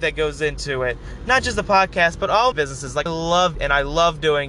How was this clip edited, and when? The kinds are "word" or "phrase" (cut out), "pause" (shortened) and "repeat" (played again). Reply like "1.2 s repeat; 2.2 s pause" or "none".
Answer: 2.5 s word; 3.1 s word; 3.5 s word